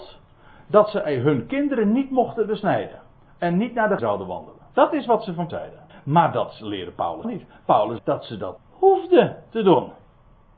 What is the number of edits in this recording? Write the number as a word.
eight